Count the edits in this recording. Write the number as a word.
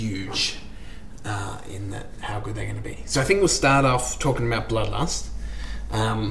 zero